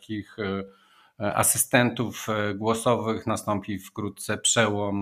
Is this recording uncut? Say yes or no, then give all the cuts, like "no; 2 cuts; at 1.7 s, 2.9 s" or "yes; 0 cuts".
yes; 0 cuts